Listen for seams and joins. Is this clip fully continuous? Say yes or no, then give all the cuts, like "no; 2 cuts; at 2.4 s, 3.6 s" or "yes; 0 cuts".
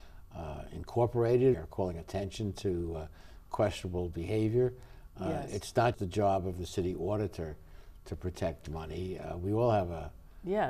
no; 2 cuts; at 1.5 s, 5.9 s